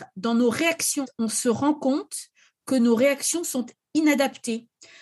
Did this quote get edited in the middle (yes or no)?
no